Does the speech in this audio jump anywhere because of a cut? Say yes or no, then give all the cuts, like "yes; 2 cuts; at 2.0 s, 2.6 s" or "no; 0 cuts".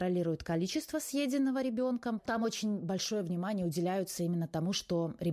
no; 0 cuts